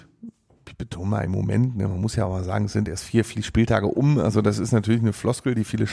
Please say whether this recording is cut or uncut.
uncut